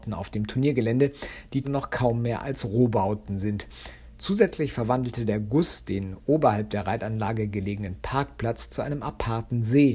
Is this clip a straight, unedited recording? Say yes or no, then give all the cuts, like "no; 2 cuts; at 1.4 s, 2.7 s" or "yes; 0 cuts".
no; 1 cut; at 1.6 s